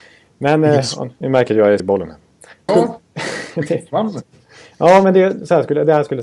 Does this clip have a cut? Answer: yes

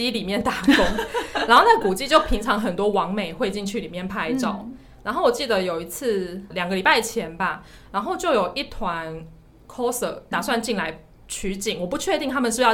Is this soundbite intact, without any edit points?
no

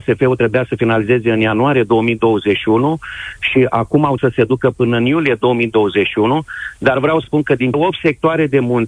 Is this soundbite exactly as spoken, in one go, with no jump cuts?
no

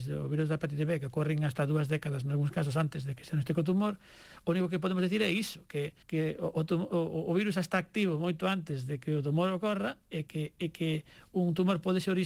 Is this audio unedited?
no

